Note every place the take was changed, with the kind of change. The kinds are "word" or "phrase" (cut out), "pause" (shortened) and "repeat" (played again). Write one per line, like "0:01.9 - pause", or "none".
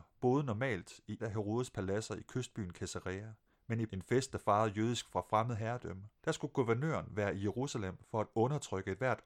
0:01.2 - word
0:03.5 - pause
0:03.9 - word
0:05.1 - word
0:06.2 - pause